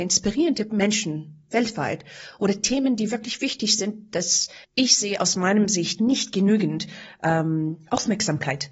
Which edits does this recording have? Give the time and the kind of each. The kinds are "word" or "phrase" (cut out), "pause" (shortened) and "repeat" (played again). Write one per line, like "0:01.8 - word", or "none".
0:04.6 - pause